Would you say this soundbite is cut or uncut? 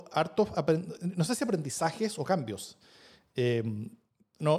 uncut